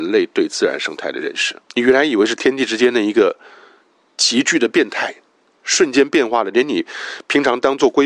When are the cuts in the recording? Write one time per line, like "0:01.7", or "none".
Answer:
0:01.6